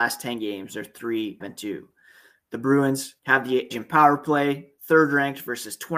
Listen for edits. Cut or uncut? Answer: cut